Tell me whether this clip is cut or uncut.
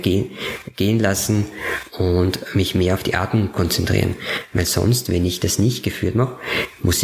uncut